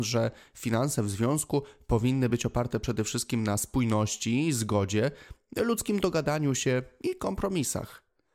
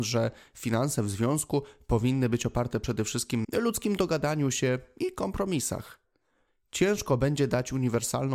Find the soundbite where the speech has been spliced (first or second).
second